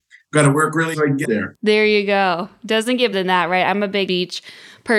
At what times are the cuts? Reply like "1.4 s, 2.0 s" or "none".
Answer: 0.9 s, 1.2 s, 3.1 s, 4.1 s